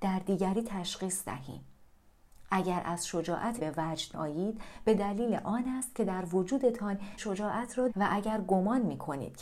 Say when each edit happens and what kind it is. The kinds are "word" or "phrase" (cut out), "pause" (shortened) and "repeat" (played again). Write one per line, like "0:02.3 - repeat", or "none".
0:03.6 - word
0:04.1 - word
0:07.2 - word
0:07.9 - word